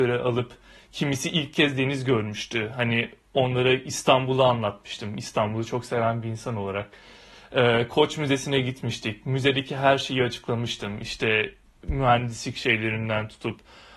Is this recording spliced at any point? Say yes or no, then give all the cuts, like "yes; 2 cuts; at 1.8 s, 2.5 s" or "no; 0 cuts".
no; 0 cuts